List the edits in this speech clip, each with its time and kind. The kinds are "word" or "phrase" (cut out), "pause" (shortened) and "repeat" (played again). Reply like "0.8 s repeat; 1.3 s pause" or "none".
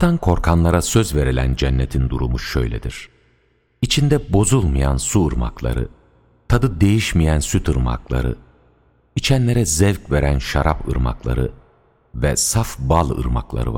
none